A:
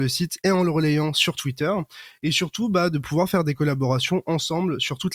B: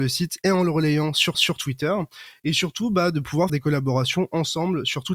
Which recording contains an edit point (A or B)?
B